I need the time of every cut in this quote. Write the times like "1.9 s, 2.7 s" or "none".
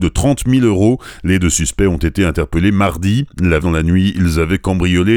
3.6 s